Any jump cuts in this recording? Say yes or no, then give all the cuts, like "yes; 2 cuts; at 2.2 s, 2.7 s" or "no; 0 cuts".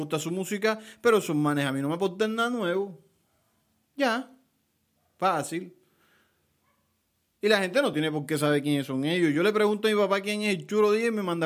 no; 0 cuts